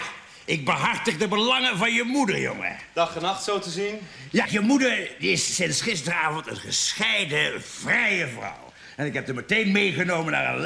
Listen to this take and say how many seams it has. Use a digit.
1